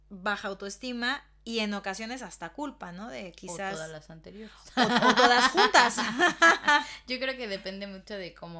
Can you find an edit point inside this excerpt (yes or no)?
no